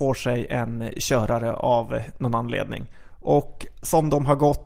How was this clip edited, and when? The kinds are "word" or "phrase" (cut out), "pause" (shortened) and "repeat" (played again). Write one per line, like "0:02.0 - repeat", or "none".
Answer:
none